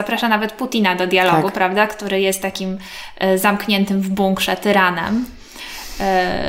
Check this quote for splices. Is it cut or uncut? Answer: uncut